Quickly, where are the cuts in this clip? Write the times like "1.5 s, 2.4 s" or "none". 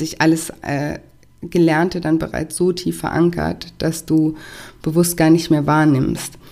none

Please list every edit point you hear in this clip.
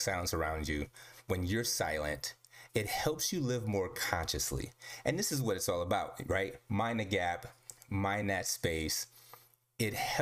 none

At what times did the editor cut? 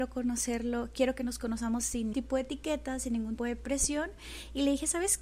2.1 s, 3.4 s

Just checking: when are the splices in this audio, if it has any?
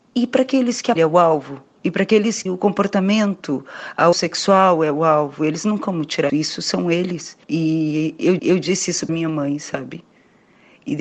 1.0 s, 2.5 s, 4.1 s, 5.8 s, 6.3 s, 7.4 s, 8.4 s, 9.1 s

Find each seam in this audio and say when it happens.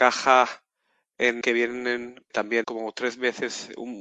1.4 s, 2.3 s, 2.6 s

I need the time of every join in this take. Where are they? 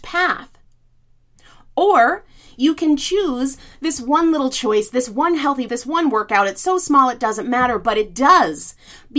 5.7 s

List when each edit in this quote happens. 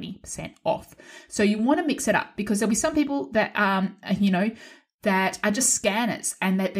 none

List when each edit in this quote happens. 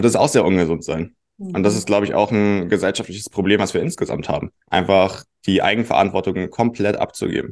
4.6 s

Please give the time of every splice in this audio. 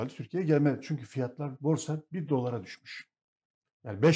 none

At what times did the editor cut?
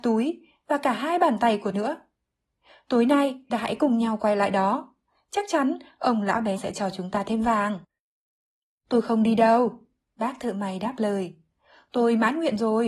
1.7 s, 3.5 s, 6.6 s

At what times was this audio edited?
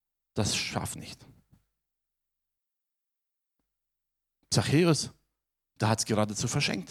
1.0 s

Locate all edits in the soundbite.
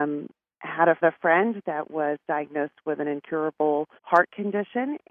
1.0 s, 4.0 s

